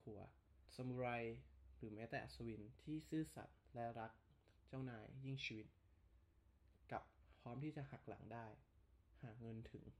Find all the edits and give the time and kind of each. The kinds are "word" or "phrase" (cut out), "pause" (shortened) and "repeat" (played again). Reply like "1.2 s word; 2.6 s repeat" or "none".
4.6 s pause